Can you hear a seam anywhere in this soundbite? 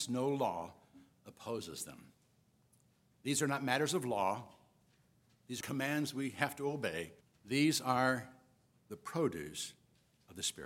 yes; 2 cuts; at 5.6 s, 7.2 s

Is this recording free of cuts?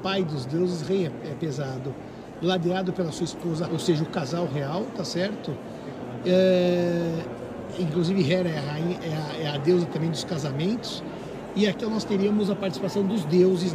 no; 2 cuts; at 3.7 s, 11.8 s

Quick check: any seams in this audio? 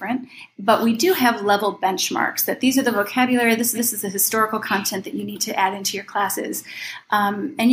yes; 1 cut; at 3.7 s

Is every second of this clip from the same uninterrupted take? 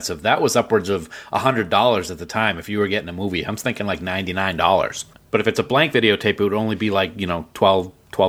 yes; 0 cuts

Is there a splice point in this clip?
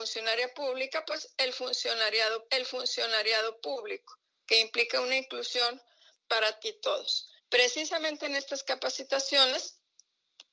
yes; 3 cuts; at 2.5 s, 6.6 s, 7.4 s

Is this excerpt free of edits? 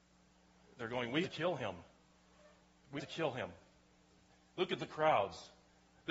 no; 2 cuts; at 1.2 s, 3.0 s

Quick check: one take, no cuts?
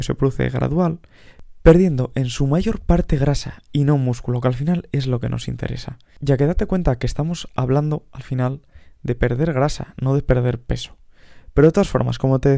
yes; 0 cuts

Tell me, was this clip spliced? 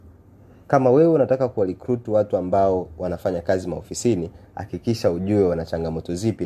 no; 0 cuts

